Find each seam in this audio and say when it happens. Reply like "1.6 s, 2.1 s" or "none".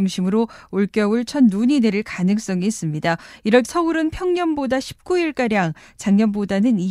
3.6 s

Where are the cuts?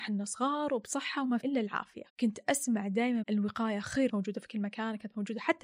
1.4 s, 2.1 s, 3.2 s, 4.1 s

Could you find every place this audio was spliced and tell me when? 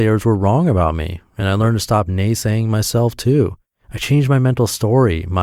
none

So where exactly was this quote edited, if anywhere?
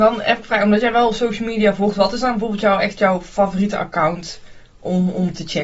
none

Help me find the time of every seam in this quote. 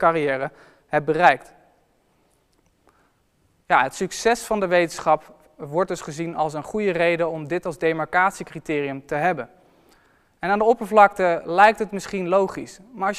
none

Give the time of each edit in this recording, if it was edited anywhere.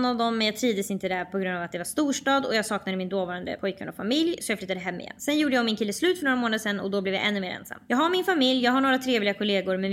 none

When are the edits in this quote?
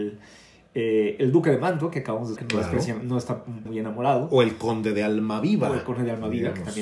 2.4 s, 3.7 s

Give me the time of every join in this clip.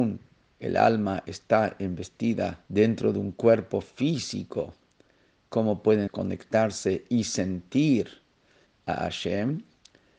2.7 s, 6.1 s

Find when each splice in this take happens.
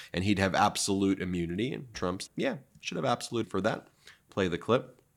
1.9 s, 2.3 s, 3.4 s

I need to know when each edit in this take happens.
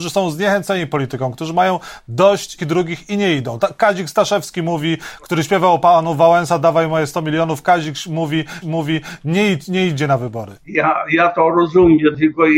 2.6 s, 8.6 s, 10.6 s

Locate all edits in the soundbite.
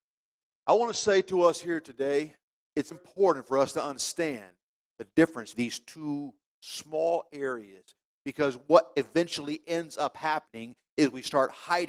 2.9 s, 5.5 s

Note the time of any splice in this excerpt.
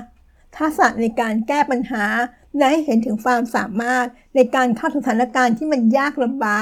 none

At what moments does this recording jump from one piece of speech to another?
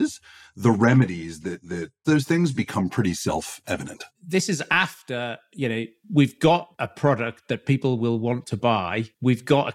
2.0 s, 4.1 s

